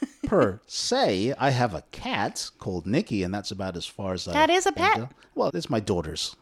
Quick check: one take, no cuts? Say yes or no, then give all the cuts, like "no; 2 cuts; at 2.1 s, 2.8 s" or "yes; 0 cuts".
no; 1 cut; at 5.5 s